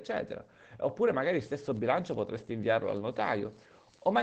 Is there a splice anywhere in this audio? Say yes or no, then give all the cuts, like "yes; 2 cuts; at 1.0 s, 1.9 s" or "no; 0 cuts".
no; 0 cuts